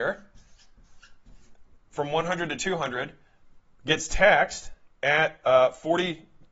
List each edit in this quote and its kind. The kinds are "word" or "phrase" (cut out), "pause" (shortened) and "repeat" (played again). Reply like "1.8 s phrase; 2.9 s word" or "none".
none